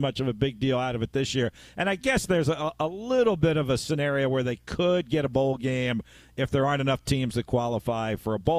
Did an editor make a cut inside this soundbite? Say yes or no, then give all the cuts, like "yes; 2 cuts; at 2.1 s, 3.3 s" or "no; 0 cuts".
no; 0 cuts